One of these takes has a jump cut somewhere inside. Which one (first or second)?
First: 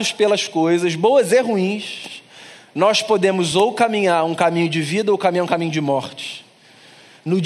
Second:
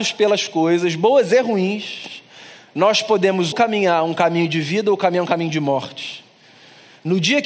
second